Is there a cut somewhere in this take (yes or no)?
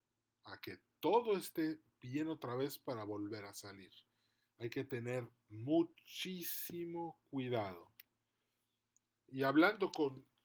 no